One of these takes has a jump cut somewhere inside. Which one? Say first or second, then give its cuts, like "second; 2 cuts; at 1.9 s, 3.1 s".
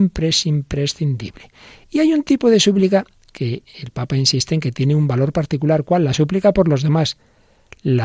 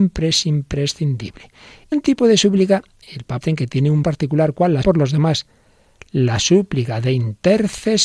second; 5 cuts; at 1.9 s, 3.0 s, 3.4 s, 4.0 s, 4.8 s